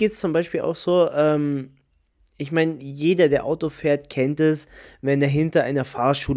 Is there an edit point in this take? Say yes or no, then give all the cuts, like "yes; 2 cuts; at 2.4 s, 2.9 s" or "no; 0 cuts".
no; 0 cuts